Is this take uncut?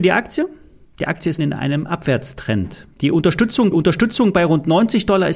no; 2 cuts; at 1.4 s, 3.7 s

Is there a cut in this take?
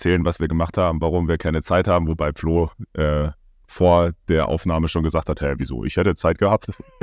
no; 0 cuts

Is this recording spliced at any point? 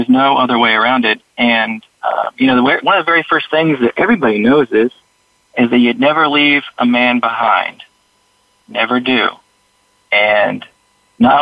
no; 0 cuts

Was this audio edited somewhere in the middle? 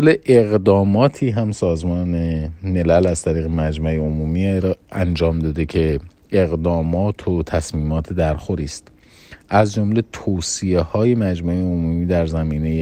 no; 0 cuts

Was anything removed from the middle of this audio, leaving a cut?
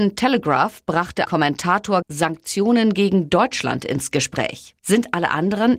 yes; 3 cuts; at 1.3 s, 2.0 s, 4.8 s

